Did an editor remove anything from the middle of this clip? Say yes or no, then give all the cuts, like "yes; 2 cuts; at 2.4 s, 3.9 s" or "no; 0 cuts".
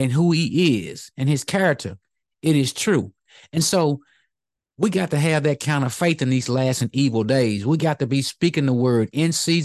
no; 0 cuts